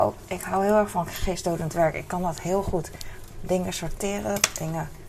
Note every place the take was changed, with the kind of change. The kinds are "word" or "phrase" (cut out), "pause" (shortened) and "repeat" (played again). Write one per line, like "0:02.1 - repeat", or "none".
none